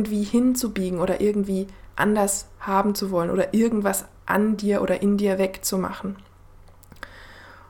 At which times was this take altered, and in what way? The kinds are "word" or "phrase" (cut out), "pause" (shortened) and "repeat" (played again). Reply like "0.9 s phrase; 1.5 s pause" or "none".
none